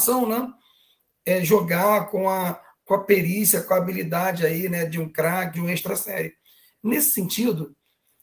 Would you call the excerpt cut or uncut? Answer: cut